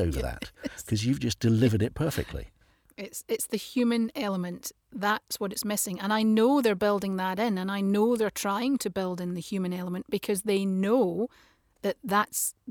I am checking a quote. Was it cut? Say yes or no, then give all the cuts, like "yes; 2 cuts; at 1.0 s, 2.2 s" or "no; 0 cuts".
no; 0 cuts